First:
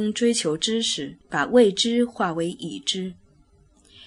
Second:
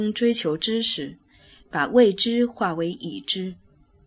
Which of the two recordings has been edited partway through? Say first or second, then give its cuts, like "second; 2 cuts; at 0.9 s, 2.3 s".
first; 1 cut; at 1.2 s